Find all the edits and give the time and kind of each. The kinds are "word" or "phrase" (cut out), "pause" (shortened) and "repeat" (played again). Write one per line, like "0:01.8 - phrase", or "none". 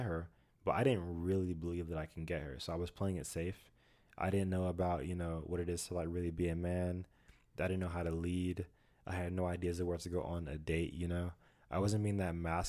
none